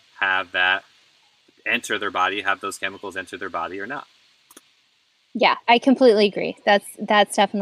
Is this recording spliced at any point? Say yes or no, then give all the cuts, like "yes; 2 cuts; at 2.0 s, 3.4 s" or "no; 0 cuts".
no; 0 cuts